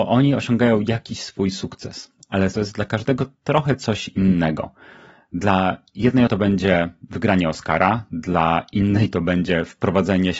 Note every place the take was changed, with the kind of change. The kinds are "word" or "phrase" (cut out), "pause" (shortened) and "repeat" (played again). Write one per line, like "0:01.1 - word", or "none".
0:02.5 - word
0:06.3 - word